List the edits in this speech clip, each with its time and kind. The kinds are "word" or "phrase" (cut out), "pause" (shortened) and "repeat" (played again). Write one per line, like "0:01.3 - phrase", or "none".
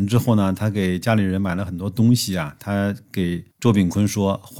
0:03.5 - pause